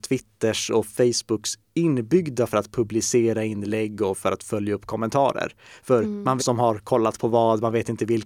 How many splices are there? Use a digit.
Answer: 2